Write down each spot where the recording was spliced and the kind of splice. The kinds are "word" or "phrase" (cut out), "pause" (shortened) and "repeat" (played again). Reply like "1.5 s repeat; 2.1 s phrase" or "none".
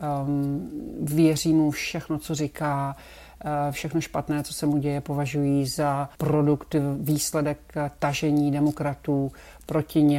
6.1 s pause